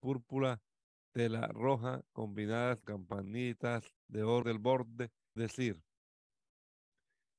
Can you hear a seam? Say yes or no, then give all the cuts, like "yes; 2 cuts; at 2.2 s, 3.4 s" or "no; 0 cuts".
yes; 4 cuts; at 2.8 s, 4.0 s, 4.4 s, 5.4 s